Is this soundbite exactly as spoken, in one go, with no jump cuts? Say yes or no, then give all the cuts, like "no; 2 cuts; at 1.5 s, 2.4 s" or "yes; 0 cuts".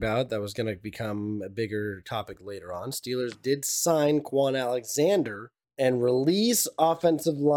no; 1 cut; at 5.6 s